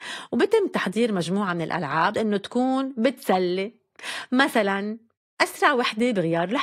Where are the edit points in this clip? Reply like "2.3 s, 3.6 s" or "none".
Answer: 2.1 s

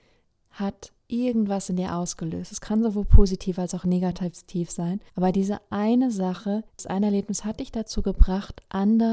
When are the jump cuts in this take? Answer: 1.0 s, 5.1 s, 6.7 s

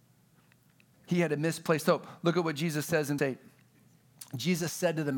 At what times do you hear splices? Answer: 3.2 s

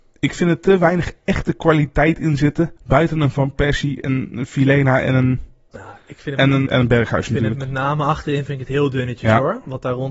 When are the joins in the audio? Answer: 2.8 s, 6.7 s

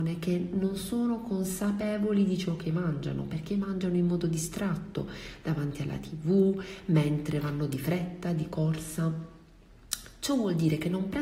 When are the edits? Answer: none

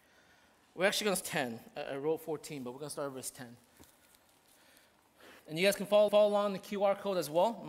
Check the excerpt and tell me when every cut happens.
1.2 s, 5.4 s, 6.1 s

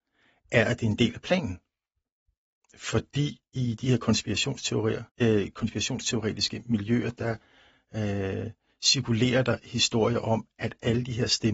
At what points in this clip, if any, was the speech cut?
5.1 s

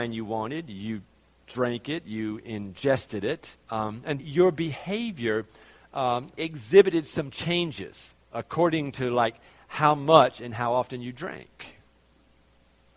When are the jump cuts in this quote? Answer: 3.6 s, 4.2 s, 6.4 s, 8.2 s

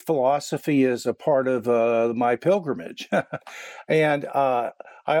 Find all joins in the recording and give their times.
none

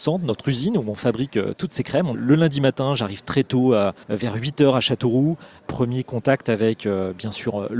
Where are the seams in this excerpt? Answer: 4.0 s

